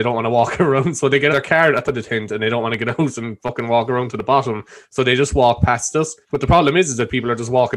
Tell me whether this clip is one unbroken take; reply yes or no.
no